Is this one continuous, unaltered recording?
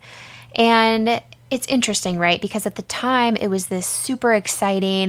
yes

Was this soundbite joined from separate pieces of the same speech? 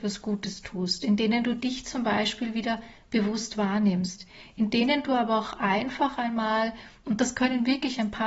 no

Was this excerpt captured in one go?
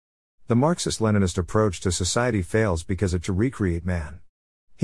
no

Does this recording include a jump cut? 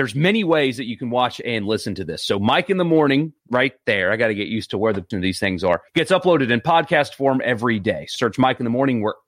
yes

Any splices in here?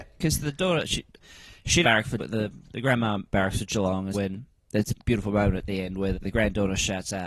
yes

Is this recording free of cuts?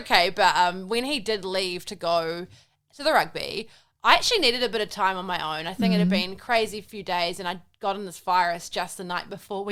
yes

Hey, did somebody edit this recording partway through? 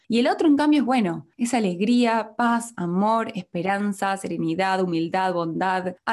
no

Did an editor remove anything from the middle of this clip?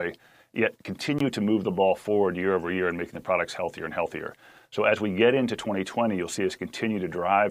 no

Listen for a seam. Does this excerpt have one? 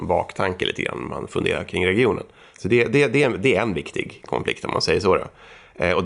no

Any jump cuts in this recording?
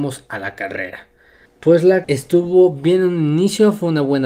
yes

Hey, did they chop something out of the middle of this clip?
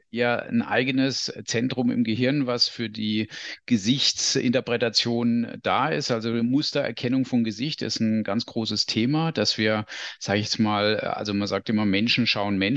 no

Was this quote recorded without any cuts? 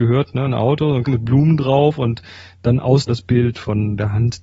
no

